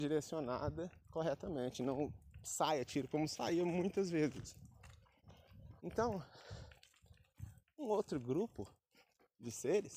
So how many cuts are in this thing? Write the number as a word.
three